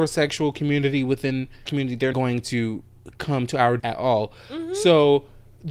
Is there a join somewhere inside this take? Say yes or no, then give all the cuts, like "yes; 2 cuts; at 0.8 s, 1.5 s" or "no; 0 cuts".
yes; 3 cuts; at 1.7 s, 2.1 s, 3.8 s